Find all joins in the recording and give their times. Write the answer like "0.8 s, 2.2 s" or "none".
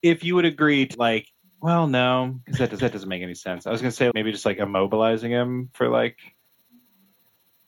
0.9 s, 2.8 s, 4.1 s